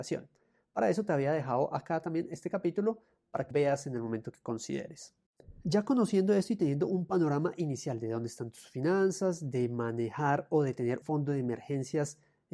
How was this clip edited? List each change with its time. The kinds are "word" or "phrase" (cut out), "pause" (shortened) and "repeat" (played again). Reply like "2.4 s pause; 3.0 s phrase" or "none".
3.5 s word; 11.0 s word